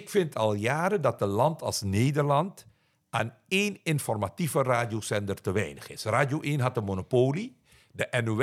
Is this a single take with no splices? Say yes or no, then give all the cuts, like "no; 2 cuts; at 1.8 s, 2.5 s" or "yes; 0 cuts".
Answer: yes; 0 cuts